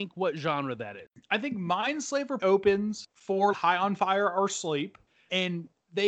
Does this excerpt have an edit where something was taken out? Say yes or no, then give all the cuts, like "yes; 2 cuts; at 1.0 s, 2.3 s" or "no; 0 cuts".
yes; 2 cuts; at 2.4 s, 3.5 s